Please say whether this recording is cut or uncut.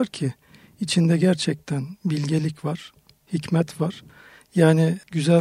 uncut